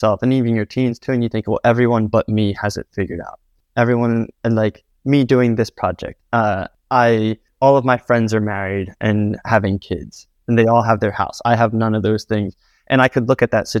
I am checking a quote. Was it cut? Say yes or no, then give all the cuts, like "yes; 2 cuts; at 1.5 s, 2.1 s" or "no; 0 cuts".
no; 0 cuts